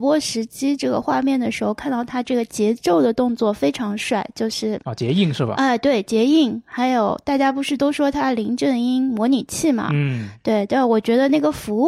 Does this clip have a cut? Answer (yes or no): no